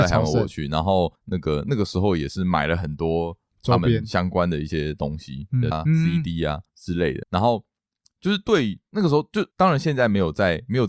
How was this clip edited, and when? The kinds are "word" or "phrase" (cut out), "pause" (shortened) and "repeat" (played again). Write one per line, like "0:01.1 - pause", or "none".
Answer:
0:01.2 - pause
0:05.7 - word
0:06.7 - pause
0:07.2 - word
0:09.5 - pause